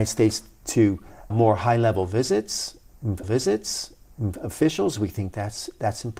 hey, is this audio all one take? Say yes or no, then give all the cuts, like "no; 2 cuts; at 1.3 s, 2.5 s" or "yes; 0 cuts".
no; 2 cuts; at 1.3 s, 3.2 s